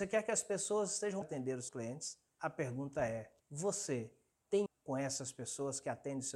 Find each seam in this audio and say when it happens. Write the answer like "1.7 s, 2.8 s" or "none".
1.2 s, 1.7 s, 2.3 s, 3.4 s, 4.7 s